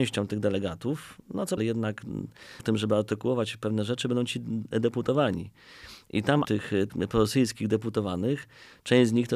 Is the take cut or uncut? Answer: cut